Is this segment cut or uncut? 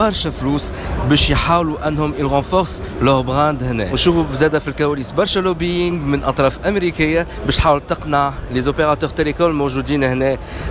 uncut